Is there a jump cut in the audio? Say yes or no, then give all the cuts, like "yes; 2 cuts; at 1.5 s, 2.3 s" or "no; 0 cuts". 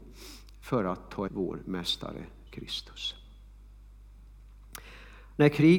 yes; 2 cuts; at 1.3 s, 2.5 s